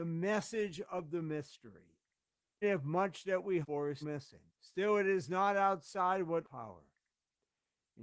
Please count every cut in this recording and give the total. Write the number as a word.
five